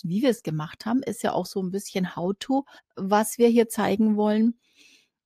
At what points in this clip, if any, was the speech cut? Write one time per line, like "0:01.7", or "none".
0:02.8